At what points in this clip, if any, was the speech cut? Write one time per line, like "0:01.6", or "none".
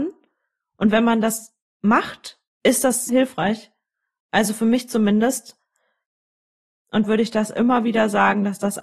0:03.1
0:07.0